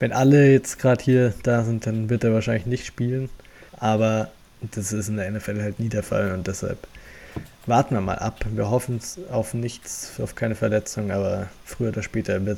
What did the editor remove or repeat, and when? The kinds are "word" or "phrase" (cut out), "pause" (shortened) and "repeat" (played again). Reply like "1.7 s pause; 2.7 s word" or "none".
3.7 s pause